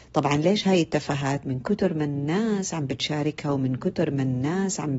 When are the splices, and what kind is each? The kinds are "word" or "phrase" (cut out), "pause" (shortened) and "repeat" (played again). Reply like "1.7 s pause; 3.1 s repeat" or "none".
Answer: none